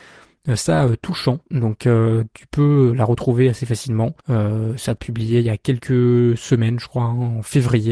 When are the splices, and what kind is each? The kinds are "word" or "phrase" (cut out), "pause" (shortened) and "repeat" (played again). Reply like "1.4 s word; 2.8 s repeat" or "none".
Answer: 4.2 s pause; 5.0 s phrase